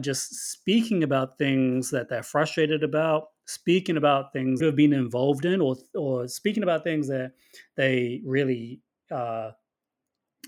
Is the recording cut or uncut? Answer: cut